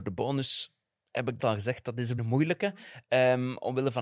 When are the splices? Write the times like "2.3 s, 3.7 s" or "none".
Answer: 1.4 s, 2.2 s